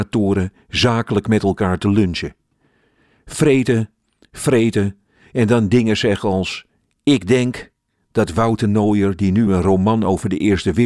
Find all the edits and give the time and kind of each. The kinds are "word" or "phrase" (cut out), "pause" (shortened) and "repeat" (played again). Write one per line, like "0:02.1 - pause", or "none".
none